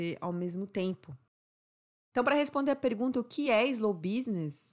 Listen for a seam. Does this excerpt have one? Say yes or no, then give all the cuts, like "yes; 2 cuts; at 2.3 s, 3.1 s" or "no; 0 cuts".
no; 0 cuts